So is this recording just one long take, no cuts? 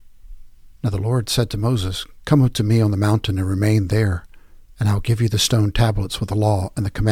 yes; 0 cuts

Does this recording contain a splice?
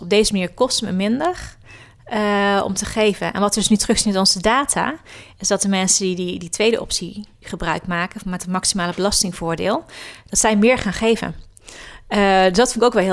no; 0 cuts

